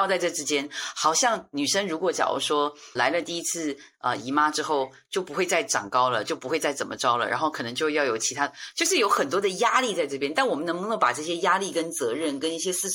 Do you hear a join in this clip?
yes; 1 cut; at 3.0 s

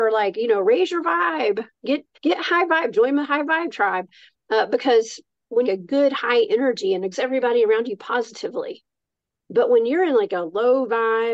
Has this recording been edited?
yes; 3 cuts; at 2.1 s, 5.6 s, 7.1 s

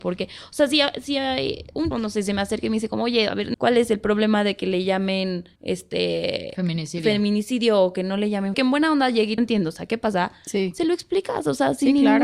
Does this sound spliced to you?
yes; 5 cuts; at 1.9 s, 3.5 s, 5.6 s, 8.5 s, 9.4 s

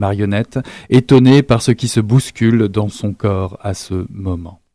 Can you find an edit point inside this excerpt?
no; 0 cuts

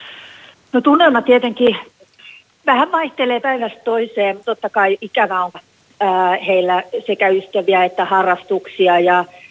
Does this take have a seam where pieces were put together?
yes; 3 cuts; at 3.4 s, 4.4 s, 5.5 s

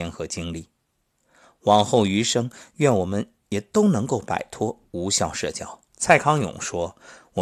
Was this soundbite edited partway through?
yes; 2 cuts; at 4.9 s, 5.9 s

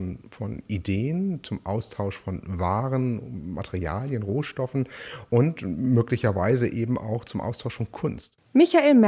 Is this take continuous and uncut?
yes; 0 cuts

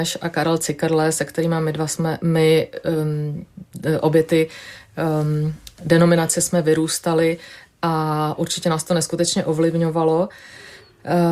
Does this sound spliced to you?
no; 0 cuts

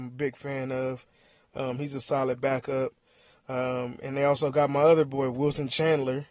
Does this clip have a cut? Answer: no; 0 cuts

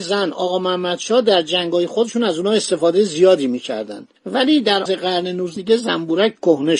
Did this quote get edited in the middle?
yes; 3 cuts; at 4.2 s, 4.9 s, 5.6 s

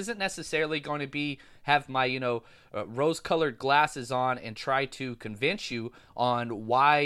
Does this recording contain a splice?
no; 0 cuts

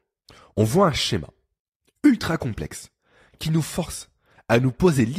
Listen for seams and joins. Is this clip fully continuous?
yes; 0 cuts

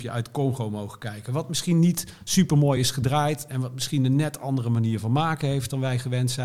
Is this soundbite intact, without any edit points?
yes; 0 cuts

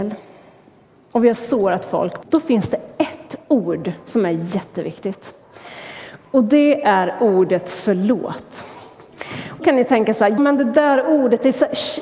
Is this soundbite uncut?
no; 3 cuts; at 2.2 s, 9.6 s, 10.4 s

